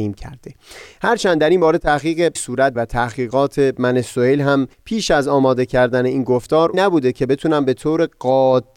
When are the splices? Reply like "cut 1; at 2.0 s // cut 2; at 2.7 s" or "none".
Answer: cut 1; at 2.4 s // cut 2; at 2.8 s // cut 3; at 4.7 s // cut 4; at 6.7 s